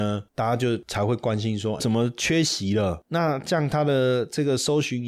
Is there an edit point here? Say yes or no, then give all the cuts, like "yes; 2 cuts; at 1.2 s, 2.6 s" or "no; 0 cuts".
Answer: yes; 1 cut; at 1.8 s